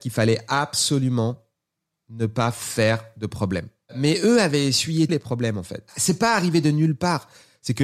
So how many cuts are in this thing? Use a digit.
1